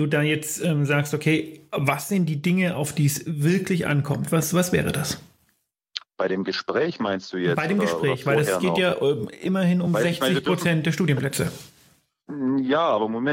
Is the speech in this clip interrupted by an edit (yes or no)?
no